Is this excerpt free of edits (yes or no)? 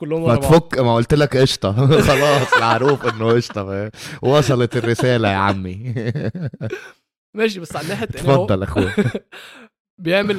yes